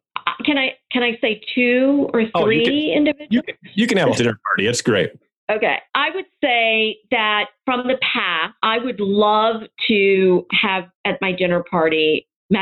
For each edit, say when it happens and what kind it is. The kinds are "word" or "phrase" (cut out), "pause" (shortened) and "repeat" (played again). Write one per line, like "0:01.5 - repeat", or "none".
0:04.1 - word
0:05.9 - pause
0:08.6 - pause
0:10.5 - word